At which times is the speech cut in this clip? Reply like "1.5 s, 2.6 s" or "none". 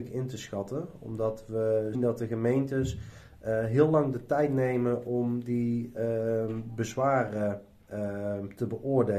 1.9 s